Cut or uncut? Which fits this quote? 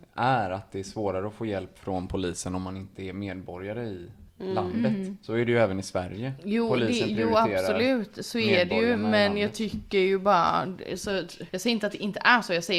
cut